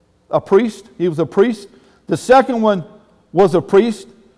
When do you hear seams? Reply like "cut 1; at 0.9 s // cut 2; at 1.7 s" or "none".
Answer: none